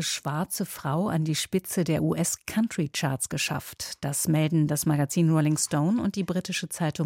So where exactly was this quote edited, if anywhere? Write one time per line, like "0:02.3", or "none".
none